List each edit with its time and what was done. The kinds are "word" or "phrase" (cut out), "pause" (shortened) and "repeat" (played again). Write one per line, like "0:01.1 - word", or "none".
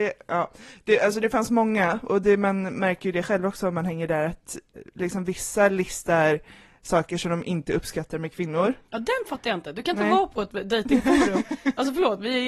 none